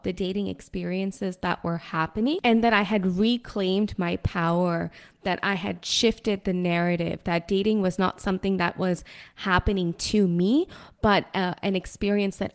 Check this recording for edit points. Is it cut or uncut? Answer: uncut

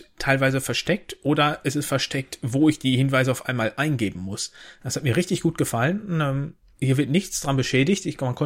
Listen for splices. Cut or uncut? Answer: cut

